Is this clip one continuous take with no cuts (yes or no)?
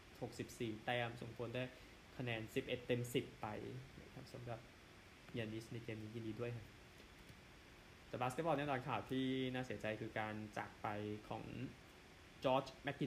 yes